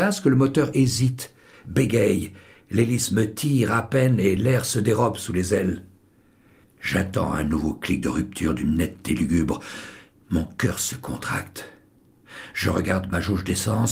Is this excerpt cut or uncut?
uncut